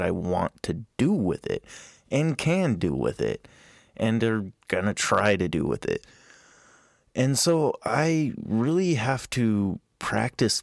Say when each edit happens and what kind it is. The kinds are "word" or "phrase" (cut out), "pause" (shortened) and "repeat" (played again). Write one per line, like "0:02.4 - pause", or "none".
none

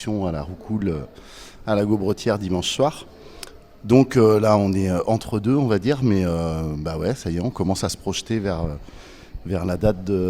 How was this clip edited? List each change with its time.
none

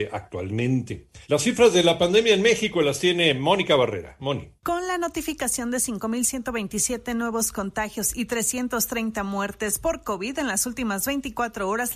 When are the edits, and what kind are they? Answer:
0:01.2 - pause
0:04.6 - pause

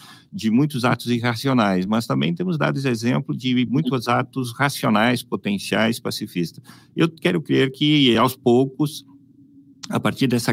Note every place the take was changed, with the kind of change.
none

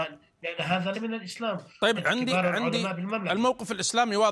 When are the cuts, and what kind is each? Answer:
0:00.9 - word
0:02.0 - word

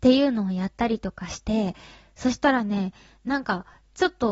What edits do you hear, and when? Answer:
none

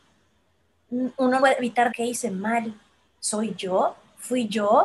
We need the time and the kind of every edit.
0:01.4 - word
0:01.9 - word

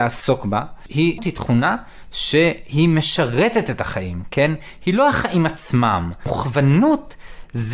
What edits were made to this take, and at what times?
0:01.2 - word

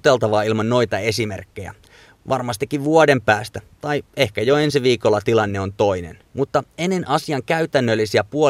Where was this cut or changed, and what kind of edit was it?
none

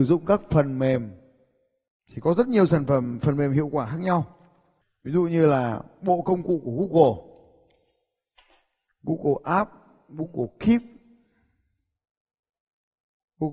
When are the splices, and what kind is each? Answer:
none

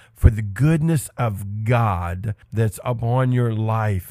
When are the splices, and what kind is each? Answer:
0:02.4 - pause

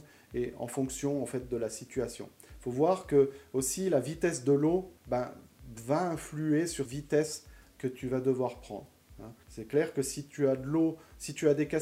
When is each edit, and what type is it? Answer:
0:05.0 - pause
0:06.8 - word
0:09.4 - pause

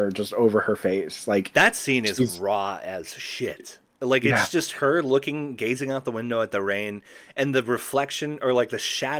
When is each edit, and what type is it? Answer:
none

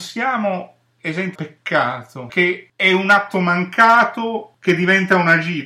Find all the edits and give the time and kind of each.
0:01.3 - word
0:02.3 - word

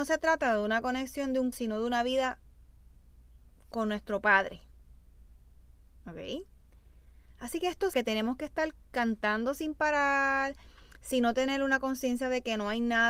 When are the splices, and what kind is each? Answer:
0:01.5 - word
0:07.9 - word

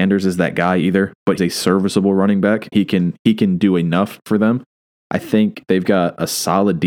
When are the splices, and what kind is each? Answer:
0:01.4 - word
0:02.7 - word
0:04.8 - pause

